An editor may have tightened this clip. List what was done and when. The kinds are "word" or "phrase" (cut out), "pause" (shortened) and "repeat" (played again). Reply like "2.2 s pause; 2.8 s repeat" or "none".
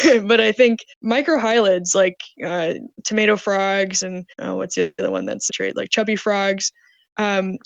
0.9 s pause; 4.3 s pause; 5.5 s phrase